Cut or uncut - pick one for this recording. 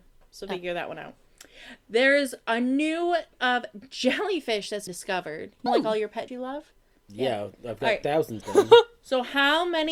cut